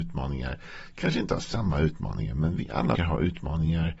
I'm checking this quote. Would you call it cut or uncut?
cut